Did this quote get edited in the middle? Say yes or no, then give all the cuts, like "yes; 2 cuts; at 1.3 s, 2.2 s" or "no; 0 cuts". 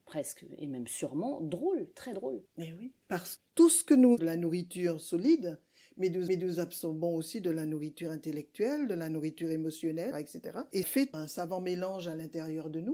yes; 6 cuts; at 2.5 s, 3.4 s, 4.2 s, 6.3 s, 10.1 s, 10.8 s